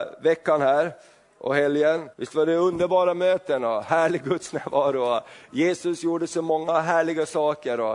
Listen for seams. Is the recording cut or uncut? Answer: cut